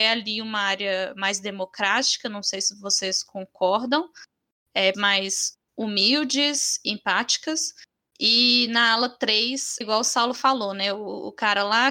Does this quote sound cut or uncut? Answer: cut